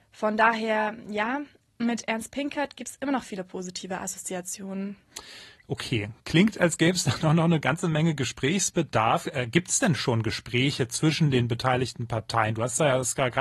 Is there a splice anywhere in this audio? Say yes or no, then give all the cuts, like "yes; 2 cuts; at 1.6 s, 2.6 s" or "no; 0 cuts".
no; 0 cuts